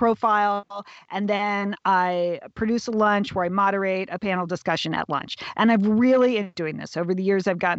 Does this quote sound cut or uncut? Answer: cut